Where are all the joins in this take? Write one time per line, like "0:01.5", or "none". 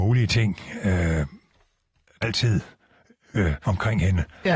0:02.2
0:03.6